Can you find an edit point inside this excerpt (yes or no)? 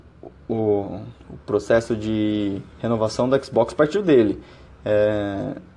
yes